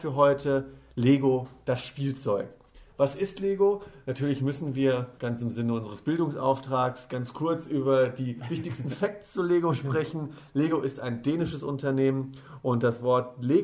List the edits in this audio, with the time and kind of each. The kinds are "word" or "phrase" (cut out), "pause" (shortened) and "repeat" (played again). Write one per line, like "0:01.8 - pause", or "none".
0:05.2 - pause